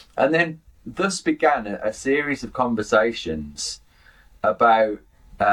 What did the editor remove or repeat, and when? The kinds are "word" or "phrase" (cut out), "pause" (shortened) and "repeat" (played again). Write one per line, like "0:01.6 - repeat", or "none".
none